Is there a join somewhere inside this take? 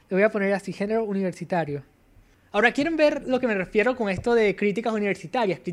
no; 0 cuts

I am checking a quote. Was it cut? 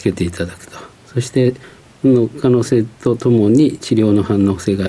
no; 0 cuts

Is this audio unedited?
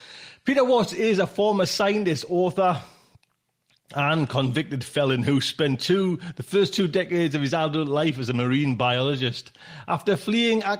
yes; 0 cuts

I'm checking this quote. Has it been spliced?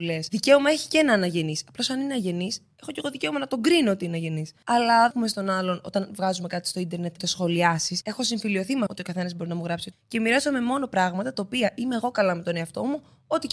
yes; 4 cuts; at 5.1 s, 7.2 s, 8.9 s, 9.9 s

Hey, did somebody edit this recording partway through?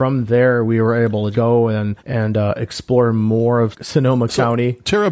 yes; 3 cuts; at 1.3 s, 2.0 s, 3.7 s

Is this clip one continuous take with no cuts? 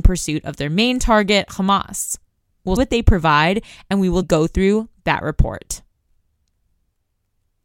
no; 2 cuts; at 2.8 s, 4.2 s

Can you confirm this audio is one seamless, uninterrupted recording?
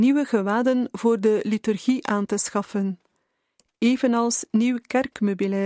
yes; 0 cuts

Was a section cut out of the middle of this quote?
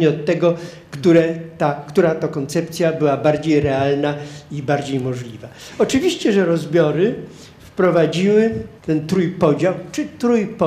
yes; 1 cut; at 8.8 s

